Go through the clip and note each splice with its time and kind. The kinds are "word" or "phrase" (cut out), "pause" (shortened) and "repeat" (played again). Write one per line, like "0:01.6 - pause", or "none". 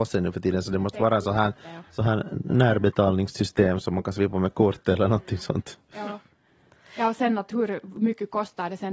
none